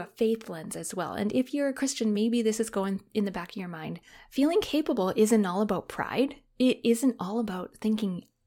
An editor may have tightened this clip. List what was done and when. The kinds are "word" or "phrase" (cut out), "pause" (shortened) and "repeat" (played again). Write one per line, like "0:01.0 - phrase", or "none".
none